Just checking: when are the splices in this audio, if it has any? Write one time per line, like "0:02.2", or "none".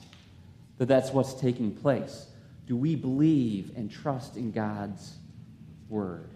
none